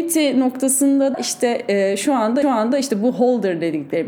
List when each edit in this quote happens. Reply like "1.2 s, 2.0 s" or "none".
1.1 s, 2.4 s